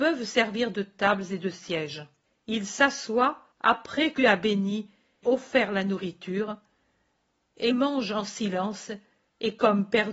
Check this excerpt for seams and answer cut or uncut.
cut